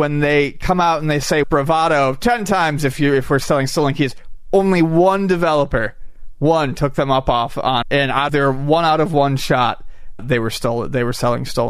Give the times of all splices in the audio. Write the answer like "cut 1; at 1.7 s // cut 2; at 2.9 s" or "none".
cut 1; at 1.4 s // cut 2; at 7.8 s // cut 3; at 8.3 s // cut 4; at 10.2 s